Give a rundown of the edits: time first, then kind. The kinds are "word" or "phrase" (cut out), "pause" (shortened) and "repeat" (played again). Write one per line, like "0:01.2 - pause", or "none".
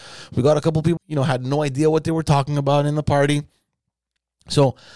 0:01.0 - word